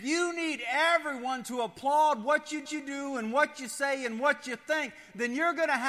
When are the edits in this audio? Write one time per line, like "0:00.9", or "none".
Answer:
0:02.7